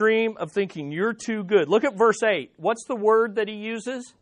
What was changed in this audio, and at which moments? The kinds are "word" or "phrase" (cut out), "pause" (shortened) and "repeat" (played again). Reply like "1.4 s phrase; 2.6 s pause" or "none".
none